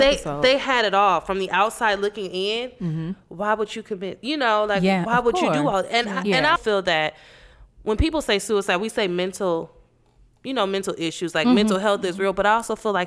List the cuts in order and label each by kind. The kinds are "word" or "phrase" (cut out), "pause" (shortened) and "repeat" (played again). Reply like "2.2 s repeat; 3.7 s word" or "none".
6.6 s word